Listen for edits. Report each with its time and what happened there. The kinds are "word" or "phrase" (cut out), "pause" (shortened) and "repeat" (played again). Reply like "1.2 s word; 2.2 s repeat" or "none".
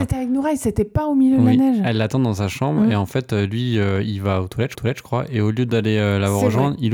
4.7 s repeat